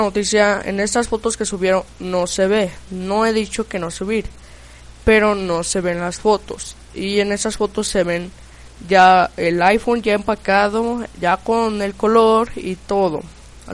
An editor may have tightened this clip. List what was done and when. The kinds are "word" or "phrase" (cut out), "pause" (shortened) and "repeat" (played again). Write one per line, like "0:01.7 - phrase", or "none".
0:03.9 - phrase
0:11.1 - pause

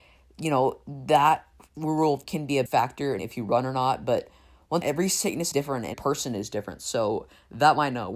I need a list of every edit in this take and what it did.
0:02.2 - word
0:02.7 - word
0:03.2 - word
0:04.8 - word
0:05.5 - word
0:05.9 - word

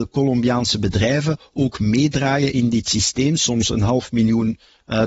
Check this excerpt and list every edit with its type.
none

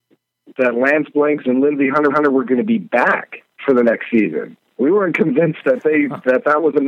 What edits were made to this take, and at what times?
0:02.1 - repeat

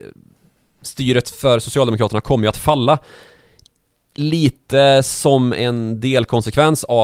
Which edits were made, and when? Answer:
none

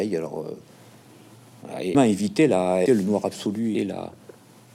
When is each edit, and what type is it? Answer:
0:01.9 - word
0:02.9 - word
0:03.7 - word

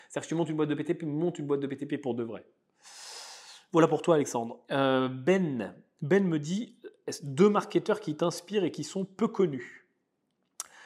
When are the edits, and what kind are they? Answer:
0:04.6 - pause

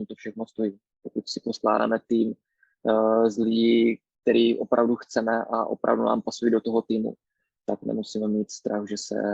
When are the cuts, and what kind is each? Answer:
none

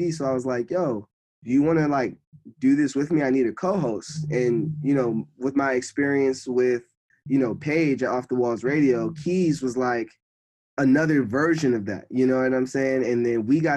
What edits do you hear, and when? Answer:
none

